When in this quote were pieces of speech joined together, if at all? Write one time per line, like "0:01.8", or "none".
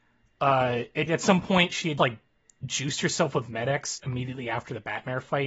0:01.1
0:02.0
0:04.0